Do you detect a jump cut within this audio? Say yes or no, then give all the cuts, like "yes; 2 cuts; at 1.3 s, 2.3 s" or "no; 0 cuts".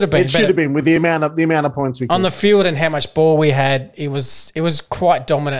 no; 0 cuts